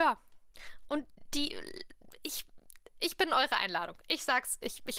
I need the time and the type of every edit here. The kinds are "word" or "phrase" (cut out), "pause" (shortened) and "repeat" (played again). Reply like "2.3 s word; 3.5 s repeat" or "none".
none